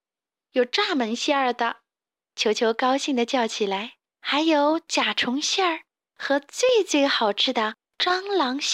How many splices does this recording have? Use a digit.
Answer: 1